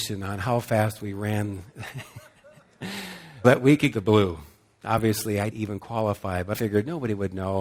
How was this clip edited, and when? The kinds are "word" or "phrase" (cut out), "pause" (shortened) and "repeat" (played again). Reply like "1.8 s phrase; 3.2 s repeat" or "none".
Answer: 3.4 s word; 3.9 s word; 5.5 s word; 6.5 s word